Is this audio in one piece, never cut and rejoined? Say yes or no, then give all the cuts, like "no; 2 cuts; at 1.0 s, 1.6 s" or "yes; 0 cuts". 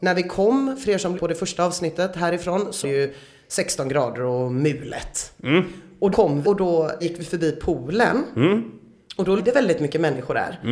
no; 6 cuts; at 1.1 s, 2.8 s, 6.1 s, 6.4 s, 7.0 s, 9.4 s